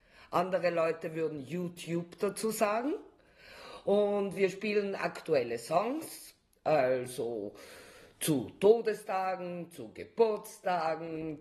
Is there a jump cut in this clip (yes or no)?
no